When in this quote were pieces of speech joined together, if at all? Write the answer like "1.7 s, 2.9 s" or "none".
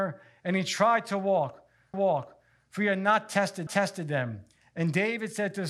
1.9 s, 3.7 s